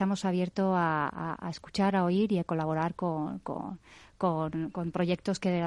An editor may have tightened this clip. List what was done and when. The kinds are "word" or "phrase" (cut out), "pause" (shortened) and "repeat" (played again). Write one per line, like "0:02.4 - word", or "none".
none